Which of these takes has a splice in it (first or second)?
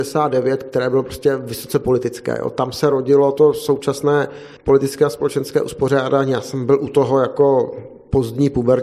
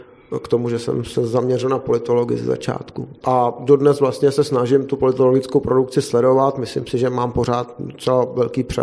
first